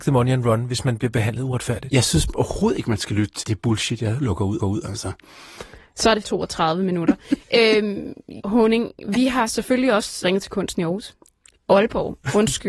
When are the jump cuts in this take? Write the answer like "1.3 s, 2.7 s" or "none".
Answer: 3.4 s, 4.6 s, 6.2 s, 8.4 s, 10.2 s